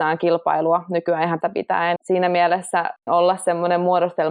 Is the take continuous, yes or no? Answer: no